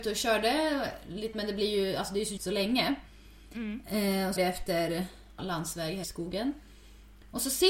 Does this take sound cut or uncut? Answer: cut